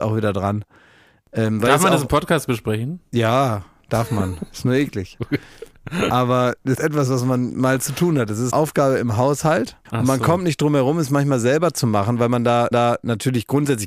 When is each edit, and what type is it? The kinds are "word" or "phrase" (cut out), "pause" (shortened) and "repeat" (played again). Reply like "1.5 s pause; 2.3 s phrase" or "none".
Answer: 6.8 s word; 8.5 s word; 9.9 s pause; 12.7 s repeat